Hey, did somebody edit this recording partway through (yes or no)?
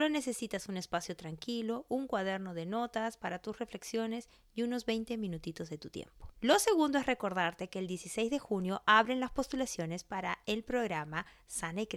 no